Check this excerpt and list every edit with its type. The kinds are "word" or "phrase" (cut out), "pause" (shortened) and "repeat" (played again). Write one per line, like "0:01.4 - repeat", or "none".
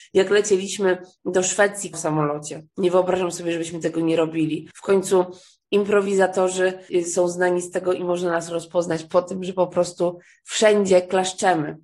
0:01.9 - word
0:04.7 - pause
0:06.9 - word